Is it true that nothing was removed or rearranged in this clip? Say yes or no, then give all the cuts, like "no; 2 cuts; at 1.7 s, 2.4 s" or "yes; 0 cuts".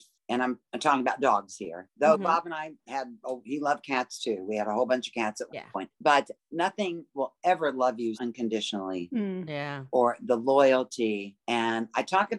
no; 1 cut; at 8.1 s